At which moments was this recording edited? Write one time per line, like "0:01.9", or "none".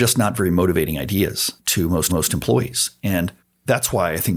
0:01.6
0:02.1
0:03.4